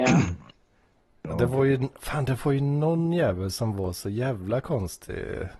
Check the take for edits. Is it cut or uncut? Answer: uncut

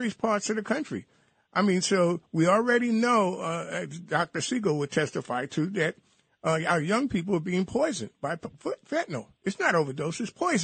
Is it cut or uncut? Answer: uncut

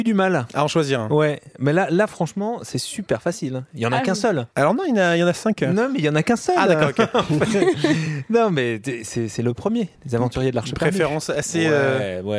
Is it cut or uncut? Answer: cut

